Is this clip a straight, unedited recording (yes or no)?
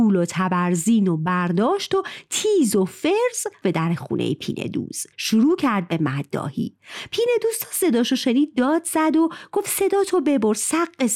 no